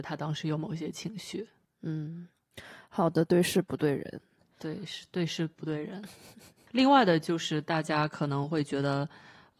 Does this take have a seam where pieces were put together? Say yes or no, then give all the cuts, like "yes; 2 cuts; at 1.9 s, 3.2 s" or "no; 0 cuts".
no; 0 cuts